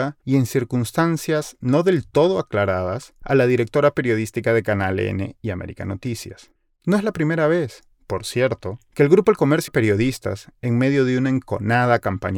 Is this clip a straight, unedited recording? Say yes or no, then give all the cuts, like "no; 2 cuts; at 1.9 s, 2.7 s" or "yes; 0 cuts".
no; 1 cut; at 9.7 s